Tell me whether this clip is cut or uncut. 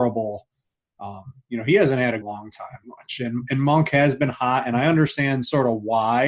cut